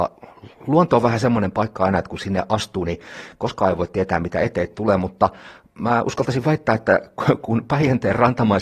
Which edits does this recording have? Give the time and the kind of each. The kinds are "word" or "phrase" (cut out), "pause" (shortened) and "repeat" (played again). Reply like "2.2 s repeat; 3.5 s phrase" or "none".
none